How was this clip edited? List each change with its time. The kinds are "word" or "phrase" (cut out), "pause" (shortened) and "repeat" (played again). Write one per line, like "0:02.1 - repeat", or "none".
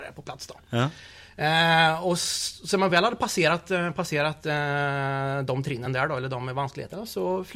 none